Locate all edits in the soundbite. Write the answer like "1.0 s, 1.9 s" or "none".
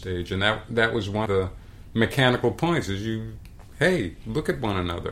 1.3 s